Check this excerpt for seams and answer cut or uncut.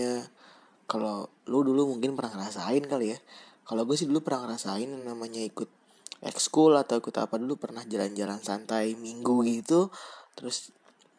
uncut